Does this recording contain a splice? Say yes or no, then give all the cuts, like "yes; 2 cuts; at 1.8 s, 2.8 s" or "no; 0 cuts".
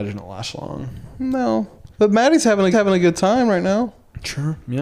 yes; 2 cuts; at 1.9 s, 2.7 s